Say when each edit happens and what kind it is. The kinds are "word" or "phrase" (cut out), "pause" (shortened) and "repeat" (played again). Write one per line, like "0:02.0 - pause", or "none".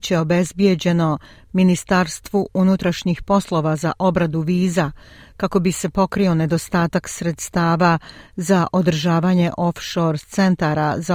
none